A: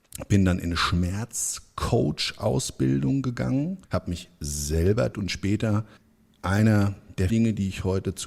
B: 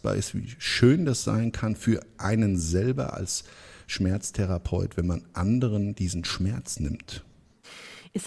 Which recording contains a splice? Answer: A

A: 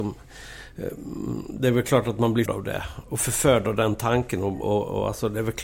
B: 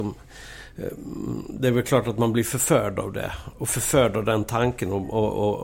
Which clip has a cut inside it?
A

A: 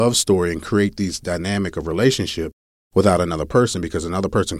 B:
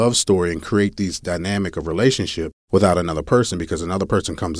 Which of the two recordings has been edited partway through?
B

